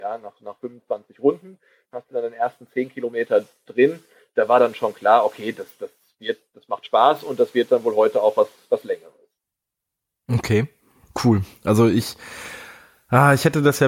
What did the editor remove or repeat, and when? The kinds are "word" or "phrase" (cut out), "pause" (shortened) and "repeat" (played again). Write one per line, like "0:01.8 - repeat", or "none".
none